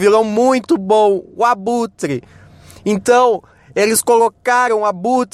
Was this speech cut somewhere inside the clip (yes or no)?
no